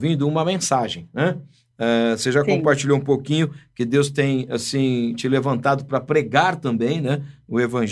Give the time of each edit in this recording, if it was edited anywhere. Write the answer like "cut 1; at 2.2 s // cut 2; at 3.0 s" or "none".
none